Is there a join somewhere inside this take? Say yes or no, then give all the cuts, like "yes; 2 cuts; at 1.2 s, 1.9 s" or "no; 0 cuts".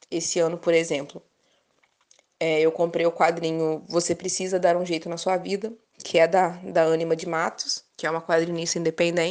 yes; 1 cut; at 7.9 s